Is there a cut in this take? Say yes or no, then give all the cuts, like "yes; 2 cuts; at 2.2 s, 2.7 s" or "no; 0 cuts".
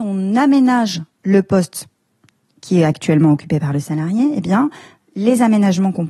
no; 0 cuts